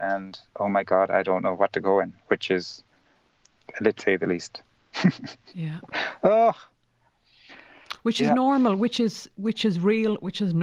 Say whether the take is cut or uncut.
cut